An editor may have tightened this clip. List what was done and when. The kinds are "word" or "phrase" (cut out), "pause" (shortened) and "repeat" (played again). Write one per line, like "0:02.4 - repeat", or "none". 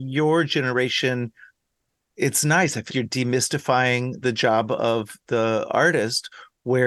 0:02.9 - word
0:04.2 - word